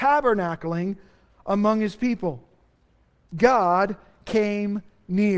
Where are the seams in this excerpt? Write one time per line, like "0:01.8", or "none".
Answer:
none